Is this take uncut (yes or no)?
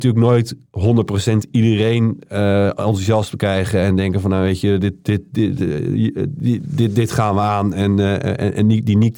yes